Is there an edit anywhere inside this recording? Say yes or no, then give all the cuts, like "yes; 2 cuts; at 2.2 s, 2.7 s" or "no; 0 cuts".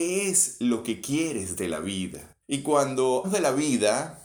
yes; 2 cuts; at 2.4 s, 3.2 s